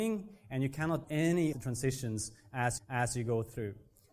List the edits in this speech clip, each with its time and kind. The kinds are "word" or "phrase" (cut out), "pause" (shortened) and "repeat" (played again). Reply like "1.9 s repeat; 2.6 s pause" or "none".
1.0 s word; 1.5 s word; 2.8 s repeat